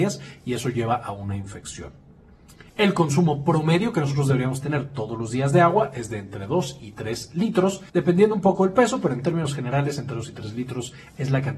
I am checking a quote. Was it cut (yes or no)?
yes